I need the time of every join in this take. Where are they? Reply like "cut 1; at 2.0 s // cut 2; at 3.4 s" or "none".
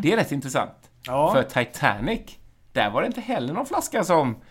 none